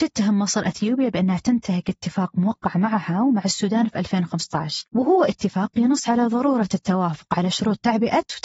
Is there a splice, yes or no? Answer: no